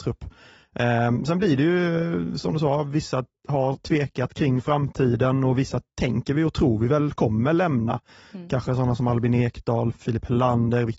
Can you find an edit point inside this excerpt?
no; 0 cuts

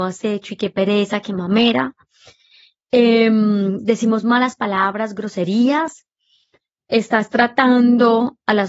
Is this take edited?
no; 0 cuts

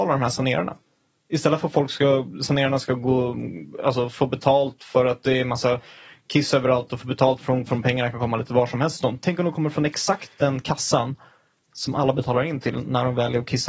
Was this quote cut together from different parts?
yes; 1 cut; at 7.7 s

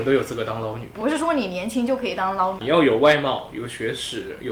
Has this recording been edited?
yes; 1 cut; at 2.6 s

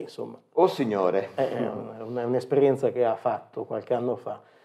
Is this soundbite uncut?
yes; 0 cuts

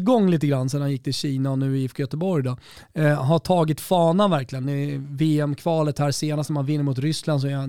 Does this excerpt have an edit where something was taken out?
no; 0 cuts

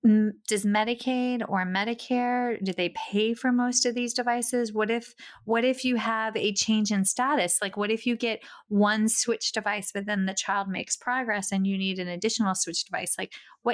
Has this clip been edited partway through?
no; 0 cuts

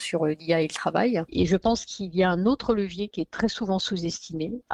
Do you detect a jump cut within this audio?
no; 0 cuts

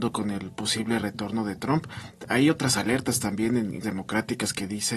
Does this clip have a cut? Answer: yes; 1 cut; at 3.8 s

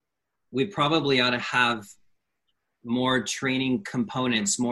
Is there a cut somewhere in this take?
no; 0 cuts

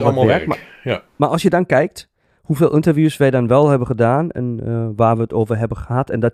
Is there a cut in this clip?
no; 0 cuts

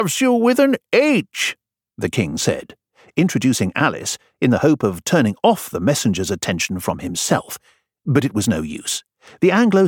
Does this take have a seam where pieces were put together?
no; 0 cuts

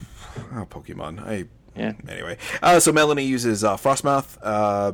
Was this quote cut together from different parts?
no; 0 cuts

